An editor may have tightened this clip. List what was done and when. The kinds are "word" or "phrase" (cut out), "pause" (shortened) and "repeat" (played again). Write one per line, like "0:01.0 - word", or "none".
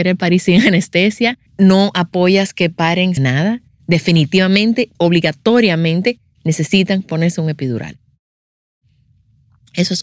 0:01.5 - pause
0:03.2 - phrase
0:04.9 - pause